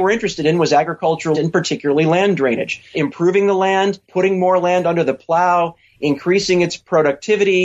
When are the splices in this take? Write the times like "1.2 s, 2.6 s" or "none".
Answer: 1.3 s, 2.9 s, 4.0 s